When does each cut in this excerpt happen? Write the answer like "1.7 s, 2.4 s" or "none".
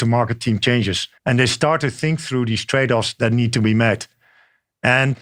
1.2 s

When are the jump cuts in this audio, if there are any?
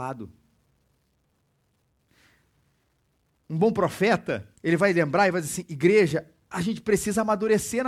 4.6 s

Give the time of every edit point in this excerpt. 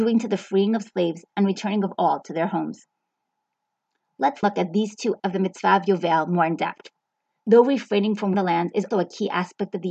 4.4 s, 5.2 s, 8.3 s, 8.9 s

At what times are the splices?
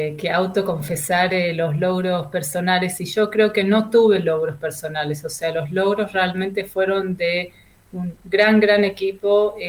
none

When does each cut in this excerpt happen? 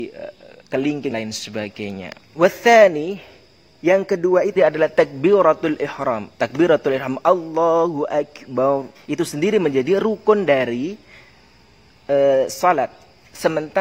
1.1 s, 2.2 s, 4.6 s, 6.3 s, 9.0 s

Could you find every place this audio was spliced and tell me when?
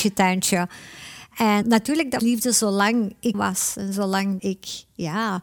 1.6 s, 2.2 s, 3.3 s, 4.4 s

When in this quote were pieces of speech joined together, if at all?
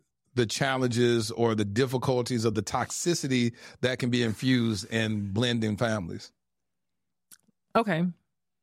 none

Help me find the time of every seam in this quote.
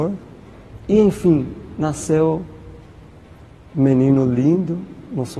3.7 s

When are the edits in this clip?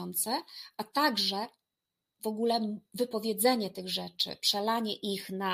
none

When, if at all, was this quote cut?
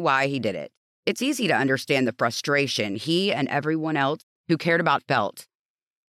5.0 s

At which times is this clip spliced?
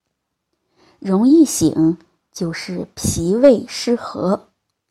none

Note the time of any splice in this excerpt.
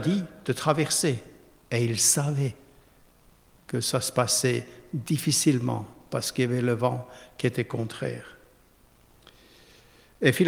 none

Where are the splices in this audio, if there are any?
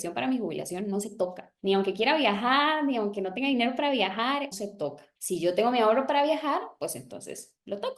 1.6 s, 4.5 s, 5.2 s

